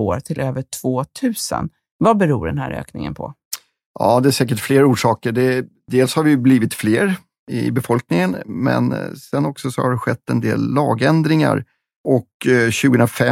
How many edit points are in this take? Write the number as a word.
zero